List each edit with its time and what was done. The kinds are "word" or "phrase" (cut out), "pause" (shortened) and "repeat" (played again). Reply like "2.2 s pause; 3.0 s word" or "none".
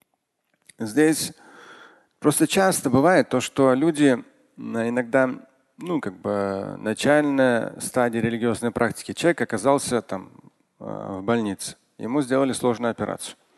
none